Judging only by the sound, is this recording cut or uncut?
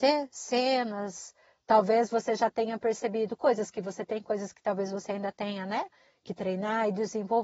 uncut